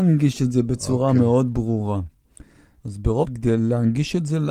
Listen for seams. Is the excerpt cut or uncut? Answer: cut